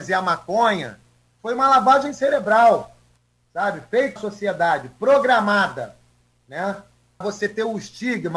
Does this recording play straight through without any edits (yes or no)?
no